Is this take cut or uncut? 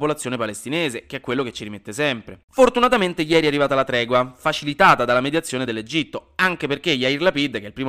uncut